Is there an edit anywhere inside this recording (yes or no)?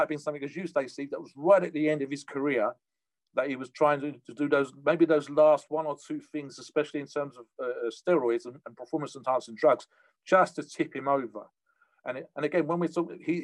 no